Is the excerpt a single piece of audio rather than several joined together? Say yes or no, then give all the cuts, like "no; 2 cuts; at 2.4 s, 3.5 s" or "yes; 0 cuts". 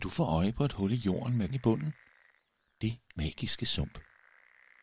no; 2 cuts; at 1.5 s, 3.2 s